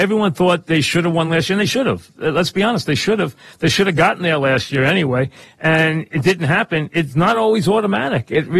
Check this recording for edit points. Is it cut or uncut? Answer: uncut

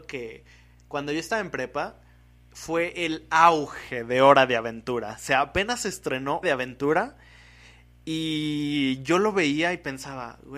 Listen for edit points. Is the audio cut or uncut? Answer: cut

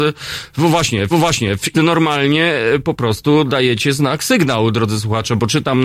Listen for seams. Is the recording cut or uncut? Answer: cut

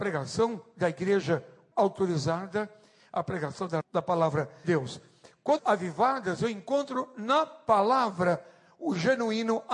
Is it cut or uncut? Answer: cut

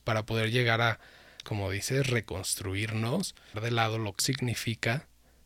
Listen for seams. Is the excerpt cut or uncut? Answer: cut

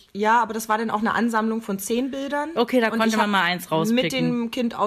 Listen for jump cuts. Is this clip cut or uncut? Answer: uncut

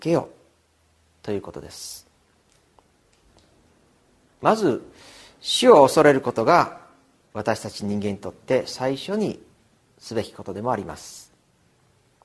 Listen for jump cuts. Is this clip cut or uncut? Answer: uncut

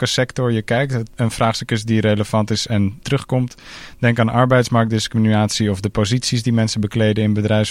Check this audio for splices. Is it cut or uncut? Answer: cut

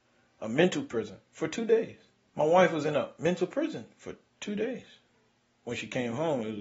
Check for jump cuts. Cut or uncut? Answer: cut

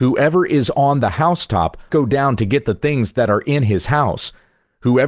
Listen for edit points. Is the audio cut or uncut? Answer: cut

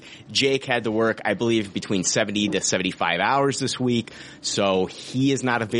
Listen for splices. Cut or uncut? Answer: uncut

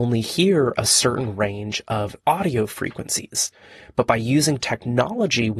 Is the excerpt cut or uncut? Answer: cut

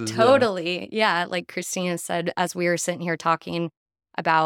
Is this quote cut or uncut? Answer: uncut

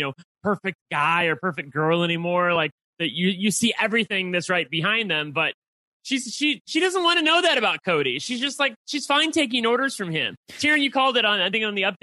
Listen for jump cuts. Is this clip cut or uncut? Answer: uncut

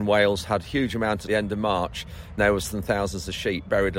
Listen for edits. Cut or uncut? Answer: cut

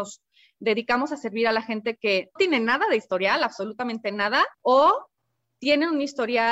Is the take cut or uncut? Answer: cut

